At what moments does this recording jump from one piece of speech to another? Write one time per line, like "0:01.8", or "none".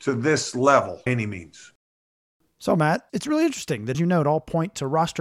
0:01.1
0:03.1
0:03.9